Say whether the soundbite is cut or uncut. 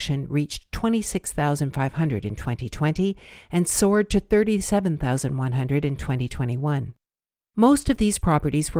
uncut